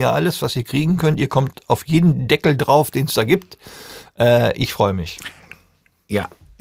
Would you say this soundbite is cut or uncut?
uncut